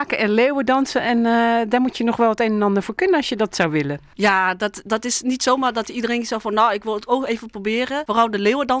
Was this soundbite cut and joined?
no; 0 cuts

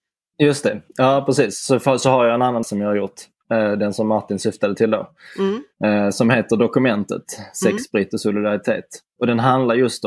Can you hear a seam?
yes; 1 cut; at 2.6 s

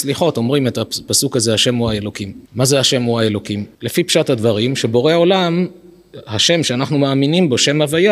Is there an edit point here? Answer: yes; 2 cuts; at 2.5 s, 3.7 s

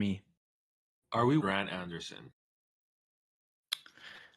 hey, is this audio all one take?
no; 1 cut; at 1.4 s

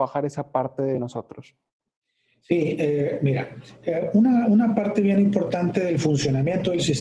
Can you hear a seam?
no; 0 cuts

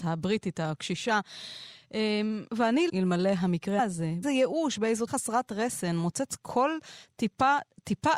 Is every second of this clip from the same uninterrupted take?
no; 5 cuts; at 2.5 s, 2.9 s, 3.8 s, 4.2 s, 5.1 s

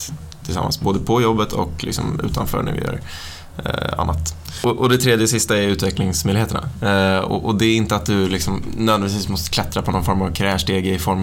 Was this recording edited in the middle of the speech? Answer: no; 0 cuts

